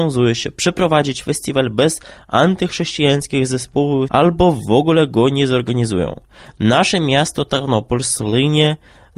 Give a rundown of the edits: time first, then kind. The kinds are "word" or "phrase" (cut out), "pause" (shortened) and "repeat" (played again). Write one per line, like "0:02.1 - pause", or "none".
0:04.1 - phrase